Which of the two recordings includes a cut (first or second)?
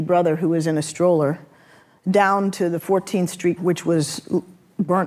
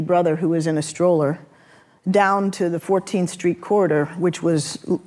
first